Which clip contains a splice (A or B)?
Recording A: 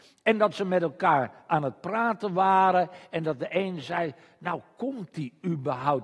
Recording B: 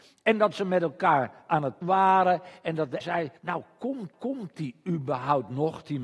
B